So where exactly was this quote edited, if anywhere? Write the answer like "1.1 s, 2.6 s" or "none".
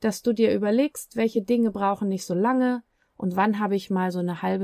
none